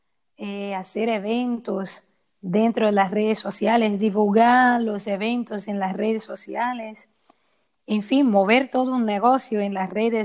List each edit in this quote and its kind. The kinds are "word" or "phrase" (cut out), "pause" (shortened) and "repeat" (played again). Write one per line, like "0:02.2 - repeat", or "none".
none